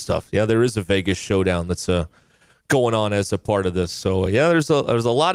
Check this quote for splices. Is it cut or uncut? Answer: uncut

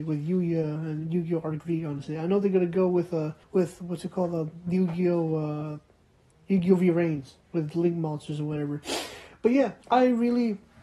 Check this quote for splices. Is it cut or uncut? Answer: cut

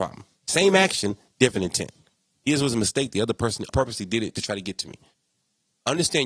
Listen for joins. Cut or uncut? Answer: cut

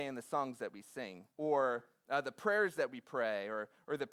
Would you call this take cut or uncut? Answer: cut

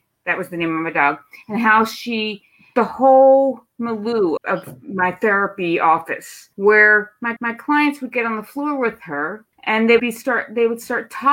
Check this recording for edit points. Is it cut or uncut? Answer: cut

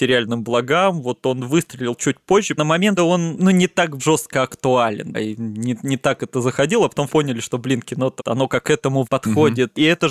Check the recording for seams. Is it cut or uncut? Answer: cut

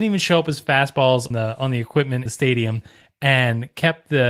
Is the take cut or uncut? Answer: cut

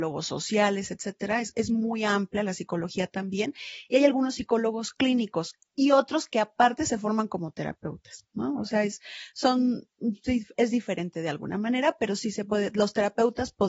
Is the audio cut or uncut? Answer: uncut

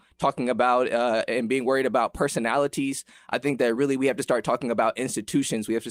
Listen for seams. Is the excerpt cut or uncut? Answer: uncut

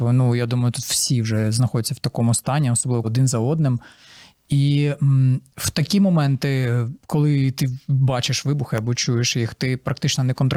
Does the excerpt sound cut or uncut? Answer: cut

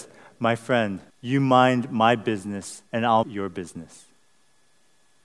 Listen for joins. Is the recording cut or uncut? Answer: cut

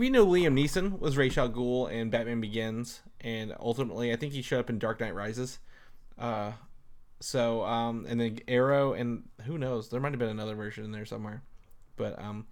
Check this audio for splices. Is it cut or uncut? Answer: uncut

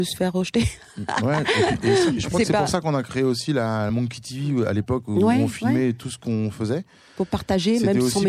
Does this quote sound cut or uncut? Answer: uncut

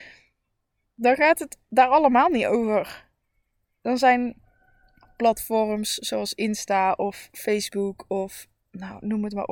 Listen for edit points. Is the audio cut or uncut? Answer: uncut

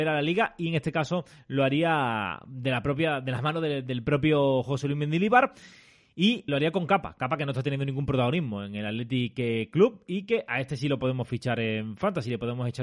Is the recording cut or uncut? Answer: cut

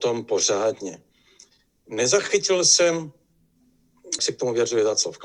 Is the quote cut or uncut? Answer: cut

